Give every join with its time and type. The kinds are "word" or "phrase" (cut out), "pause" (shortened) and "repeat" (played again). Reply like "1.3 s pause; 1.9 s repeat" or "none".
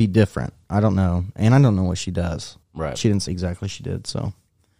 2.6 s pause; 3.3 s word